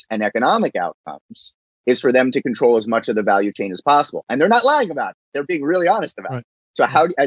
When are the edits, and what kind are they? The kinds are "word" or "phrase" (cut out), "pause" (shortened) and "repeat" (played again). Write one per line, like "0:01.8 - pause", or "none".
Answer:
none